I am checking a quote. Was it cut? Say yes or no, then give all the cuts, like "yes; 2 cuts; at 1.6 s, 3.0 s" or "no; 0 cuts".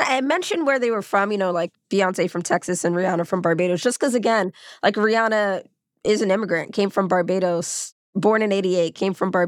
no; 0 cuts